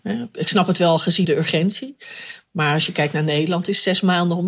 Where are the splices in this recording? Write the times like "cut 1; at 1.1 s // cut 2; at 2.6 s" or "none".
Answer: cut 1; at 1.2 s